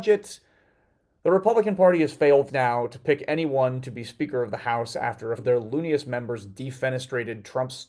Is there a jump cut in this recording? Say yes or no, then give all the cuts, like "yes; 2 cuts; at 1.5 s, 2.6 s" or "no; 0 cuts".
yes; 2 cuts; at 2.5 s, 5.4 s